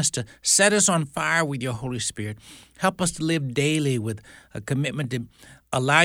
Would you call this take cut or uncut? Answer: uncut